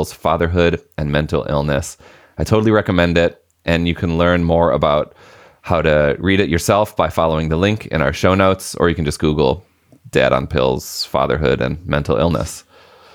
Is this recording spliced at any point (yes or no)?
no